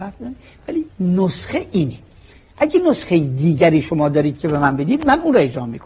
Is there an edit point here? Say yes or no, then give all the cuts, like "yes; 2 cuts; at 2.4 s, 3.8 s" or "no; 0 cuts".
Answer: no; 0 cuts